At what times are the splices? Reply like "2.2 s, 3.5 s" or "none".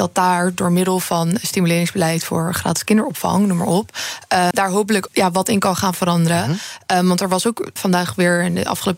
4.5 s, 5.1 s, 7.8 s